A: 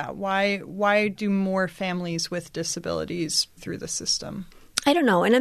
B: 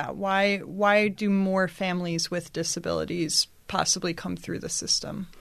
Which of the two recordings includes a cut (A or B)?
A